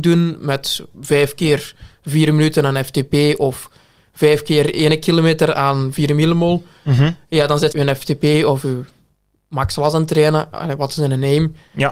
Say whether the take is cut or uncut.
cut